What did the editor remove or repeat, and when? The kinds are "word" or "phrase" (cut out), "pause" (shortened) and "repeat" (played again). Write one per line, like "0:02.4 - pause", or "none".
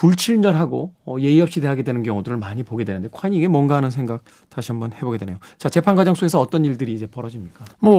0:04.3 - pause

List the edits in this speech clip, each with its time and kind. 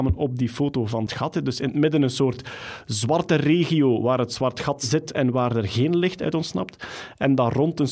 0:01.1 - phrase

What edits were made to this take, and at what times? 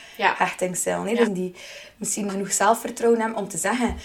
0:01.3 - phrase
0:02.3 - word

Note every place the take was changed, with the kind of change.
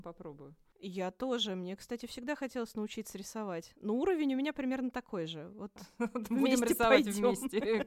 none

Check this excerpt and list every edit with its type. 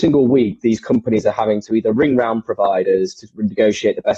none

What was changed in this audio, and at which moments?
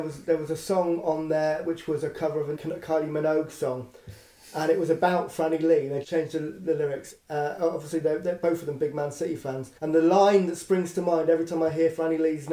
0:02.6 - phrase
0:06.0 - word
0:09.8 - pause

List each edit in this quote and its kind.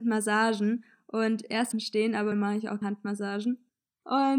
0:01.7 - phrase
0:02.3 - word
0:02.8 - word

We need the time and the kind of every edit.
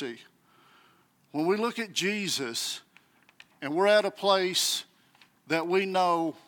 none

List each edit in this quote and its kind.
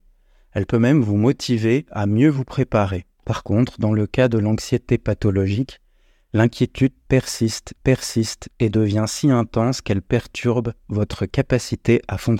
0:03.1 - pause
0:07.8 - repeat

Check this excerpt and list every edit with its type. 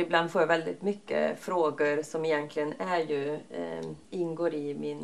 0:04.0 - pause

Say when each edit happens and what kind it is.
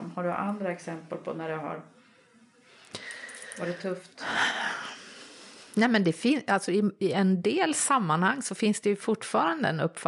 none

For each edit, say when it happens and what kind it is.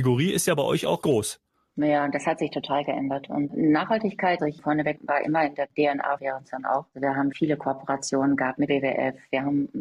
0:01.0 - word
0:04.4 - word
0:04.9 - word
0:06.2 - word
0:07.3 - word
0:08.7 - word

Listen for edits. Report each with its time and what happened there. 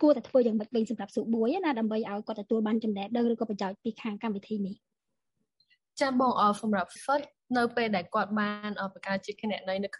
0:07.0 - word

